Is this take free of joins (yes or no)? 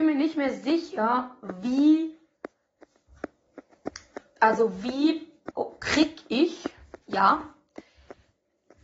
no